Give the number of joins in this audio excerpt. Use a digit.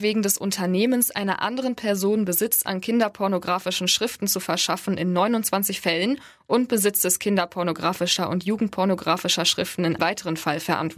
1